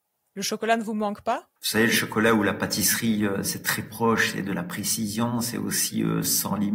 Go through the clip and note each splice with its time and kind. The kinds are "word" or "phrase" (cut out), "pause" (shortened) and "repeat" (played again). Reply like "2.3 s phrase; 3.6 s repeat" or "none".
1.6 s pause